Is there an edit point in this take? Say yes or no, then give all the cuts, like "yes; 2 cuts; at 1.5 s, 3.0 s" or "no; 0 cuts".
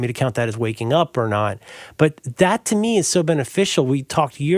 no; 0 cuts